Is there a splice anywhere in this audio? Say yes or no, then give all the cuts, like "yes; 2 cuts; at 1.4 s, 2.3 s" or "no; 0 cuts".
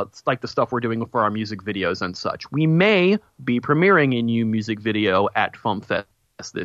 no; 0 cuts